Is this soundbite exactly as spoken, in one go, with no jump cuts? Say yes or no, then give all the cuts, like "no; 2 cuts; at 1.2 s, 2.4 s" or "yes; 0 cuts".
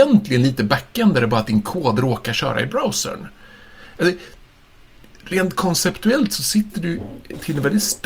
yes; 0 cuts